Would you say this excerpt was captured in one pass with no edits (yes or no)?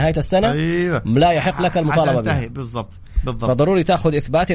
yes